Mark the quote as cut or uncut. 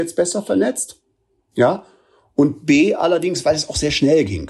uncut